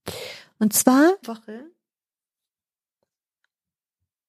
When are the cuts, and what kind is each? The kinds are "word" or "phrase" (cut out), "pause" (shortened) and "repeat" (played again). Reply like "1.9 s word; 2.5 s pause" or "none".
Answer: 1.2 s phrase